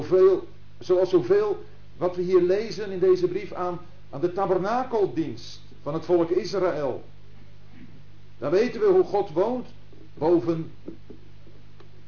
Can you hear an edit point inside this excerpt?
no; 0 cuts

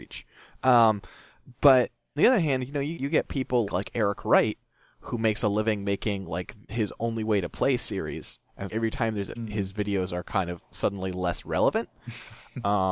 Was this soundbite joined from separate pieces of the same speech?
yes; 6 cuts; at 2.2 s, 2.9 s, 3.6 s, 6.7 s, 8.7 s, 9.4 s

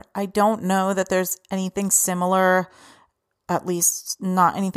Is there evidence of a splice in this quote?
no; 0 cuts

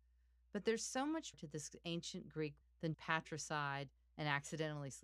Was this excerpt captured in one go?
no; 3 cuts; at 1.3 s, 2.6 s, 2.9 s

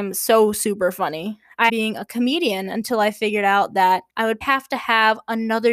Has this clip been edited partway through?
yes; 3 cuts; at 1.7 s, 4.1 s, 4.4 s

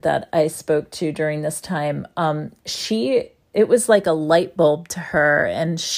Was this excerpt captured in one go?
yes; 0 cuts

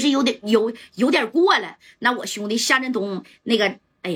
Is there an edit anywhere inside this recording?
no; 0 cuts

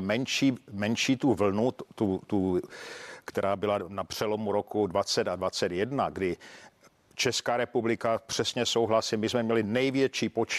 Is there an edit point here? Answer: no; 0 cuts

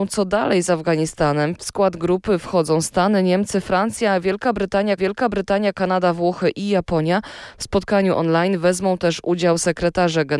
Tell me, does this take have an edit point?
yes; 1 cut; at 5.0 s

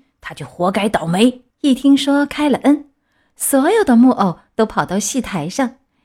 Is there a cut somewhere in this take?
yes; 1 cut; at 1.5 s

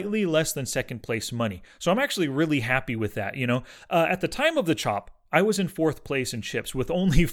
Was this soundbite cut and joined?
no; 0 cuts

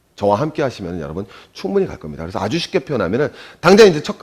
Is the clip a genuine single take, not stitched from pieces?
yes; 0 cuts

